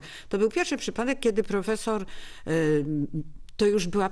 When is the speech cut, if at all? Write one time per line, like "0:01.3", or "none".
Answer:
none